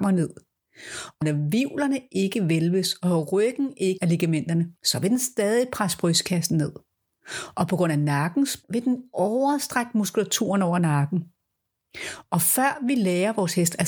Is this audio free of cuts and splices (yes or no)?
no